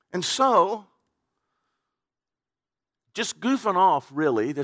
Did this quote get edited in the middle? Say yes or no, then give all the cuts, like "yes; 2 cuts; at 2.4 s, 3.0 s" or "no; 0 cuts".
no; 0 cuts